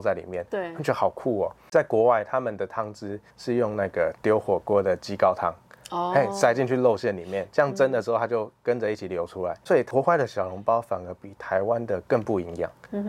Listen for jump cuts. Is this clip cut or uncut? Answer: cut